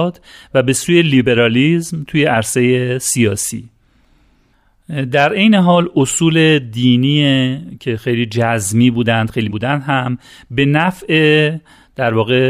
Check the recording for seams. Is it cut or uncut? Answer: cut